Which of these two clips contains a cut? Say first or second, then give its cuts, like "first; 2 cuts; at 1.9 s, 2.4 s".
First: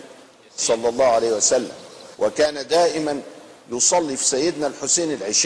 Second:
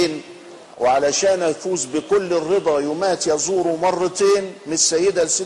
first; 1 cut; at 2.1 s